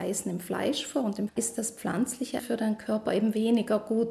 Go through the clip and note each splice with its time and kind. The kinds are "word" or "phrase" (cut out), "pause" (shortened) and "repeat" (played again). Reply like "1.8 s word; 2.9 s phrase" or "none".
1.3 s word; 2.4 s word